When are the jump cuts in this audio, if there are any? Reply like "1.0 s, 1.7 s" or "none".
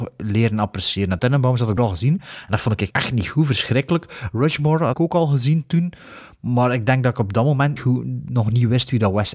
1.2 s, 1.8 s, 2.9 s, 4.9 s, 7.8 s